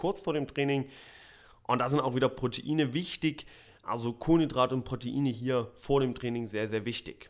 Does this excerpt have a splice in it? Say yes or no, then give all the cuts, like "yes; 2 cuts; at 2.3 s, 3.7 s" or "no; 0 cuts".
no; 0 cuts